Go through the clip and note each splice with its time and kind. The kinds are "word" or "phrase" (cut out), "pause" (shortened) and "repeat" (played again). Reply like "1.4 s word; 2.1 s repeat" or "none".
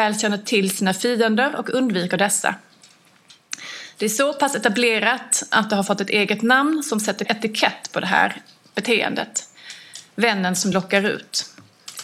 none